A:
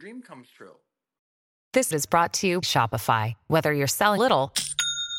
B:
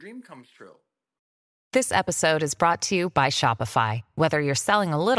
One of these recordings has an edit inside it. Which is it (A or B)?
A